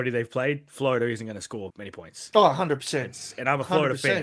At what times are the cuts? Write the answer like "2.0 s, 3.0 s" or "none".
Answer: 1.7 s